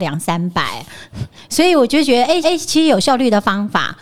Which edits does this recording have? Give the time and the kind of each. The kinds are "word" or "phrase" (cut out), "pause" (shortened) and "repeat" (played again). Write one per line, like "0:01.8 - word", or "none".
0:02.4 - repeat